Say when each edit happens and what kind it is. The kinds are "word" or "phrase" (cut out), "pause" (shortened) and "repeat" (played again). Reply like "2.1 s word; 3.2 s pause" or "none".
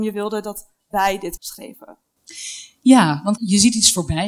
1.4 s word; 3.4 s word